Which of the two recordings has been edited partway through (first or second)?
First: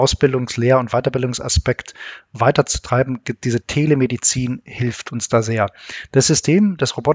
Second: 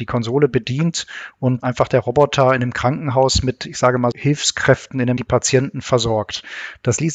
second